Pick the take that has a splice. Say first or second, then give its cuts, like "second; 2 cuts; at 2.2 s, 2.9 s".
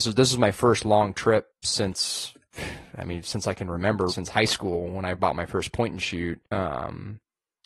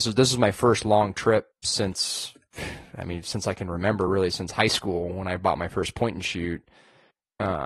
first; 2 cuts; at 4.1 s, 6.4 s